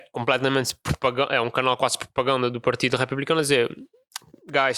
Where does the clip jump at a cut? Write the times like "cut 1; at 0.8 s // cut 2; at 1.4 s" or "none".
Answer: none